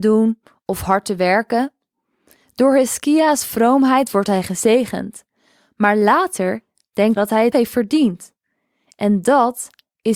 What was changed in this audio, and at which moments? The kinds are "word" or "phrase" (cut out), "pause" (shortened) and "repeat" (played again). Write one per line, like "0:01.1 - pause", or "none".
0:07.2 - word
0:07.5 - word